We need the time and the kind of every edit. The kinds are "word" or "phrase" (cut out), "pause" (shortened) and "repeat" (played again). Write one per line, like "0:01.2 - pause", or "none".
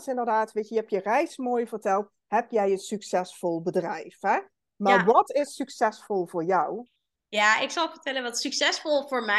none